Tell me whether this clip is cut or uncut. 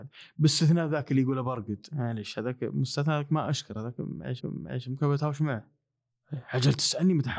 cut